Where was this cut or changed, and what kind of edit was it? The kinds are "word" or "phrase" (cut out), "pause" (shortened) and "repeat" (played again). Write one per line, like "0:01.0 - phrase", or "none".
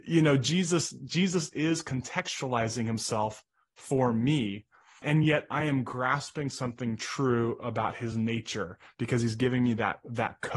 none